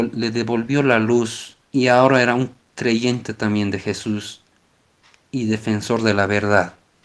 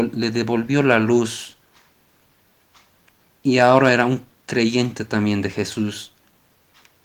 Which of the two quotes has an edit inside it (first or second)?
first